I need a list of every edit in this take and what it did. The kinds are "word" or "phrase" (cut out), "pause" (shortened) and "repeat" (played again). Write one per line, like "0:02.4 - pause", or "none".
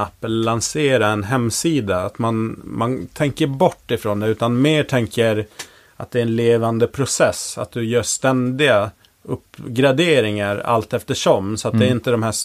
none